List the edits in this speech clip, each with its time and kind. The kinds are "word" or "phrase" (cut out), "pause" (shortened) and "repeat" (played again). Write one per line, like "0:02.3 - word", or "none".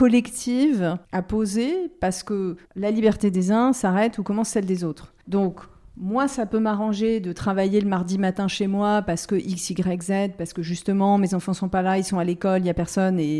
0:01.0 - pause
0:02.7 - pause
0:05.2 - pause